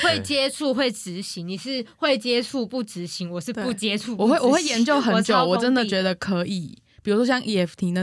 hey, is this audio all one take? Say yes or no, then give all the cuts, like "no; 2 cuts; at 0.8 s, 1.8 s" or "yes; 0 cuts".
yes; 0 cuts